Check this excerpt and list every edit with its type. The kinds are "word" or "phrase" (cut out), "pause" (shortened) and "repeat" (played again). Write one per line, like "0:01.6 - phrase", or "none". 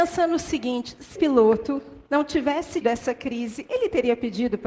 0:01.1 - word
0:02.8 - word